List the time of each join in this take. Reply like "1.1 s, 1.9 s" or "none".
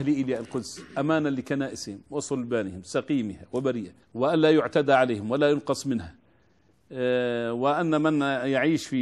4.0 s